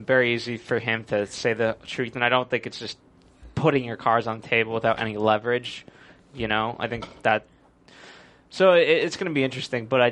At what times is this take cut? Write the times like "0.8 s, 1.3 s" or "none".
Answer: none